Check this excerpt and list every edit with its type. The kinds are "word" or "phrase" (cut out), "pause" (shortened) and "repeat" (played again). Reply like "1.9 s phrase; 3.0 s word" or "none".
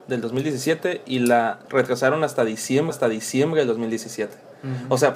1.6 s pause; 2.9 s repeat